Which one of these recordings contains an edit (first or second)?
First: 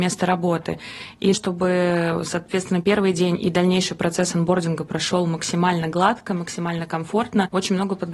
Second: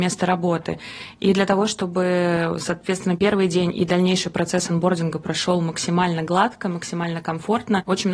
first